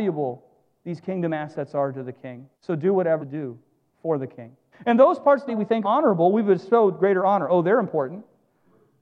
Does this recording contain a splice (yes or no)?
yes